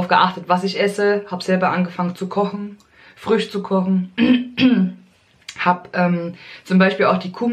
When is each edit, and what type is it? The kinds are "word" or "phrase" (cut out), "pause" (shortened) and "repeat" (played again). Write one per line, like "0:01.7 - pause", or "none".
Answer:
none